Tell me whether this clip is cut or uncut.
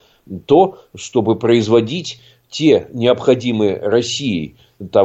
uncut